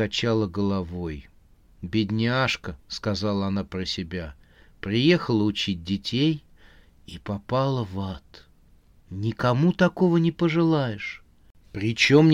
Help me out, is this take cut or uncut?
uncut